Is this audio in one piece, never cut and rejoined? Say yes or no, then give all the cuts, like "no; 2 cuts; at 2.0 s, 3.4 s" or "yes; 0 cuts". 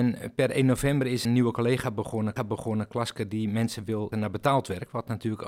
no; 3 cuts; at 1.2 s, 2.4 s, 4.1 s